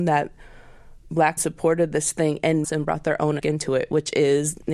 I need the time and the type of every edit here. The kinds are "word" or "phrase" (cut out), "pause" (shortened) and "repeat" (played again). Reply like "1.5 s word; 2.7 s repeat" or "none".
1.4 s word; 2.6 s word; 3.4 s word